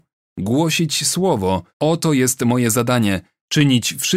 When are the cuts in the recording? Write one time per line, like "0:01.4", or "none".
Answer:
0:01.7

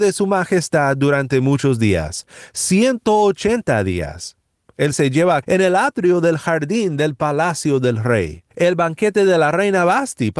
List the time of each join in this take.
0:04.9
0:05.4
0:08.5

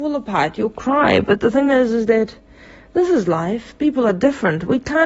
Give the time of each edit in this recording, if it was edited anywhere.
none

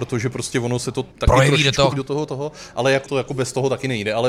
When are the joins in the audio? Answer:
0:01.1
0:01.9
0:03.1

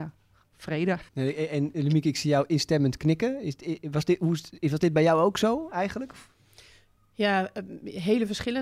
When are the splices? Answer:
0:01.1

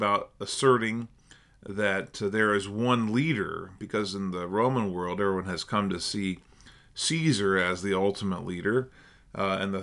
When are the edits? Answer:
none

